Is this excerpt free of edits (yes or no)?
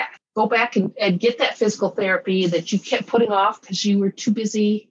yes